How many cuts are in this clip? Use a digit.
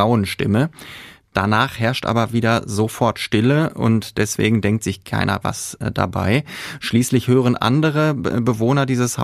0